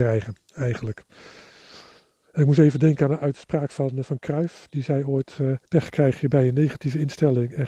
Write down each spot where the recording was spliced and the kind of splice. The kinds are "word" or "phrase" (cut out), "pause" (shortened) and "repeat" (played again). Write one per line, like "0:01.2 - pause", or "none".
0:05.7 - pause